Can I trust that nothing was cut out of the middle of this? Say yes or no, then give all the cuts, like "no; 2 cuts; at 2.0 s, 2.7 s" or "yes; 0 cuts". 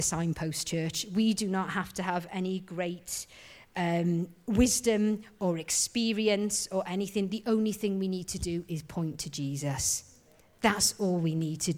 yes; 0 cuts